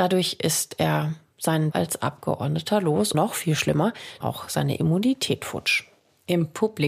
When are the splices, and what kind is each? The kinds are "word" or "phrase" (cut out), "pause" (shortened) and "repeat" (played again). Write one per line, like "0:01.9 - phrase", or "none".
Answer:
0:01.7 - word
0:03.1 - word
0:04.2 - phrase